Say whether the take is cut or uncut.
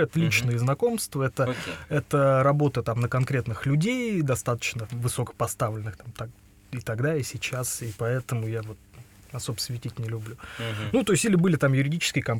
uncut